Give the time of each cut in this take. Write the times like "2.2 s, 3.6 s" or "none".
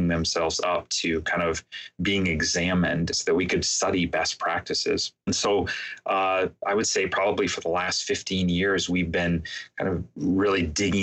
3.1 s